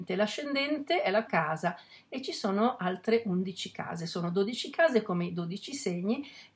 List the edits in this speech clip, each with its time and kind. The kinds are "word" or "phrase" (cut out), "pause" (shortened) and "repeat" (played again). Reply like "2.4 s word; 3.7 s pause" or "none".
1.3 s phrase